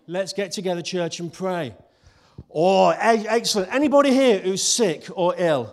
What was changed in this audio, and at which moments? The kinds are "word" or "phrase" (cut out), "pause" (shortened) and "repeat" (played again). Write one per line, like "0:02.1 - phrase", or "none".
none